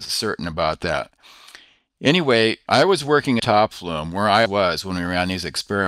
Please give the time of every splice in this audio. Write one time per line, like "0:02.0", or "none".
0:03.4
0:03.7
0:04.5